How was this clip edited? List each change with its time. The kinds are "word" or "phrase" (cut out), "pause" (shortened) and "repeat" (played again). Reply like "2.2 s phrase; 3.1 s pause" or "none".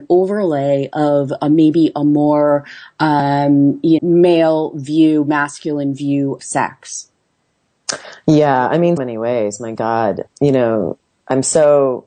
4.0 s word; 6.4 s word; 9.0 s word; 10.3 s word